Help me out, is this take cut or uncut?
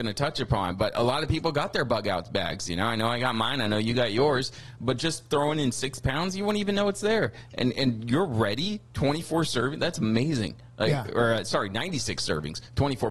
uncut